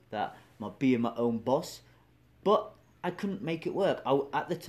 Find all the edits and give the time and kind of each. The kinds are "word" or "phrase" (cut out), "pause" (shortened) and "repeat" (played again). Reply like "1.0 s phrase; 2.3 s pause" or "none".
none

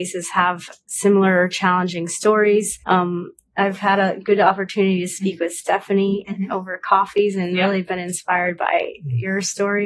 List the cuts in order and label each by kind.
2.8 s pause

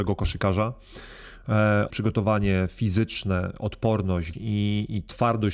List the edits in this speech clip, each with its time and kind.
1.9 s word; 4.3 s word

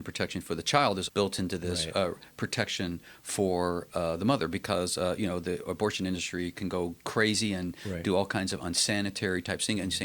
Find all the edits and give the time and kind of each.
1.1 s word

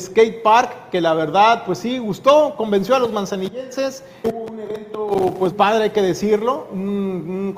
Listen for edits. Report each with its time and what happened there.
4.2 s word; 5.5 s word

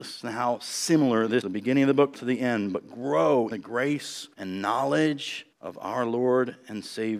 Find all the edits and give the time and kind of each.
1.4 s word; 2.1 s word; 3.5 s word; 4.3 s pause; 5.5 s pause

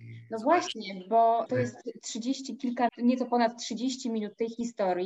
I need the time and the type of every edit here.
1.5 s word; 2.9 s word

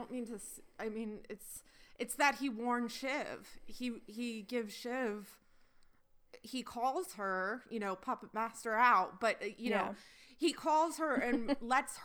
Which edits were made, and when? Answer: none

